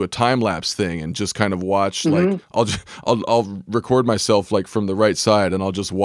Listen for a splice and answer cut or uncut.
uncut